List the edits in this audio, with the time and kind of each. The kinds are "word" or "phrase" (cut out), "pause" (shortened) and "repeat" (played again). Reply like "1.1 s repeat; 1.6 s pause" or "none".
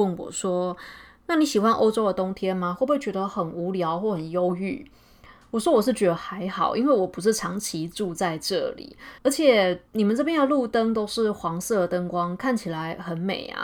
9.2 s pause; 9.9 s pause